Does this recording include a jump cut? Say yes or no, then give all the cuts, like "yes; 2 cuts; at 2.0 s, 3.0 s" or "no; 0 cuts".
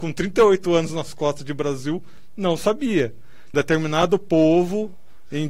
yes; 1 cut; at 3.5 s